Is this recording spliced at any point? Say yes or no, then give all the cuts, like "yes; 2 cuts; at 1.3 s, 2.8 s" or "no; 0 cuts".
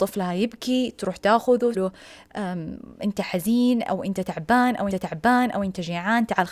yes; 2 cuts; at 1.7 s, 4.9 s